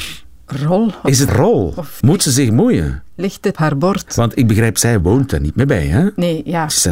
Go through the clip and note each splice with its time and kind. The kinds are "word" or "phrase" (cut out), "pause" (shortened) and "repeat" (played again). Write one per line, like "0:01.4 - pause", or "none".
0:01.3 - word
0:02.0 - word
0:03.5 - word